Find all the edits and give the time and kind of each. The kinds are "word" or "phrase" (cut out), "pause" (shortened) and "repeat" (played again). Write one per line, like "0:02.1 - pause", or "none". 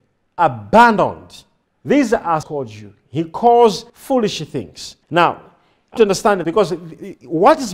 0:01.6 - pause
0:02.4 - phrase
0:03.9 - pause
0:05.0 - pause
0:06.0 - phrase
0:06.4 - word